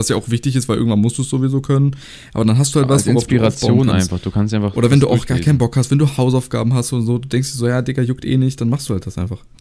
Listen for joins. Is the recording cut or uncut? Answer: uncut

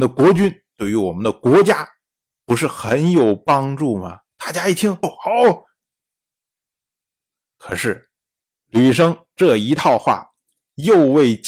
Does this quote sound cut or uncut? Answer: cut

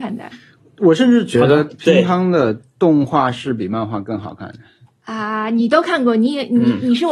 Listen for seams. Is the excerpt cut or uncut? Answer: uncut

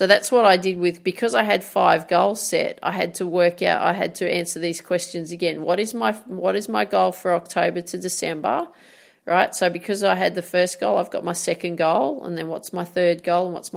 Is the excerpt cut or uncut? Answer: uncut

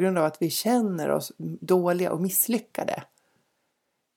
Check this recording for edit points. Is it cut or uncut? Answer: uncut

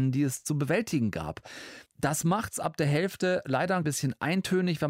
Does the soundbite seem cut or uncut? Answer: cut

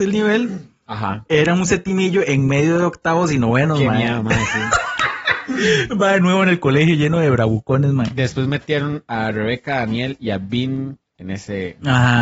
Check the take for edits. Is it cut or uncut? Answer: uncut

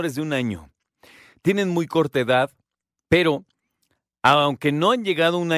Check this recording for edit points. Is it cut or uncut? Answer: uncut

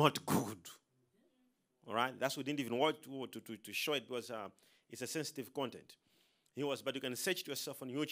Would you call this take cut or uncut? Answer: uncut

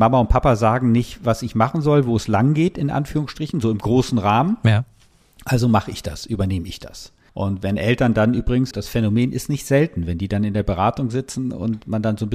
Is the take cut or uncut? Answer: cut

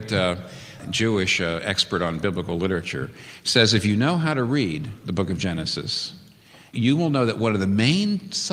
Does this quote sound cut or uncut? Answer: uncut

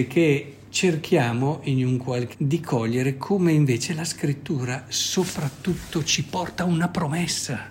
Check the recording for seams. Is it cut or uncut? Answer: cut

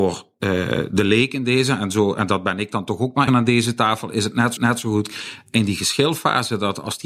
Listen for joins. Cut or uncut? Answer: cut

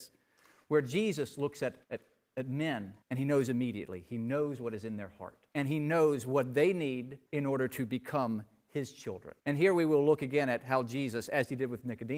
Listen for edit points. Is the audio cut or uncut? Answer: cut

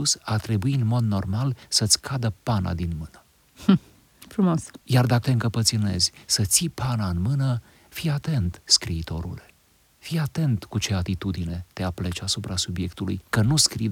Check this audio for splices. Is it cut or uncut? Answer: cut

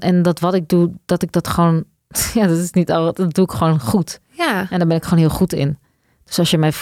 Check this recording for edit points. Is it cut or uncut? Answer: uncut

